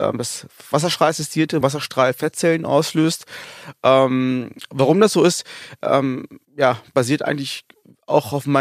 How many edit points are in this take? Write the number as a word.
two